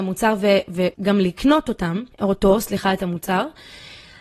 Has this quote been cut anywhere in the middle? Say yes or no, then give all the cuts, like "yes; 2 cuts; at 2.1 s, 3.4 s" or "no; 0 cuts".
yes; 2 cuts; at 0.9 s, 2.1 s